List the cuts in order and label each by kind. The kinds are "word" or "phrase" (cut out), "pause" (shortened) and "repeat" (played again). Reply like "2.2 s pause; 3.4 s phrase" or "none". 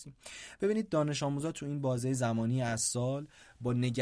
none